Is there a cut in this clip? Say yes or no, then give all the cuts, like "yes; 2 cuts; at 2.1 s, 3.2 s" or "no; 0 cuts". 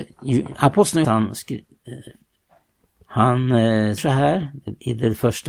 yes; 2 cuts; at 1.0 s, 4.0 s